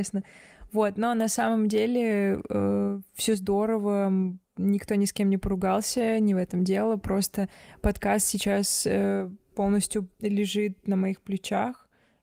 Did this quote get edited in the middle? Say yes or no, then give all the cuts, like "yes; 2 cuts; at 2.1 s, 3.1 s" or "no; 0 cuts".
yes; 2 cuts; at 4.4 s, 10.1 s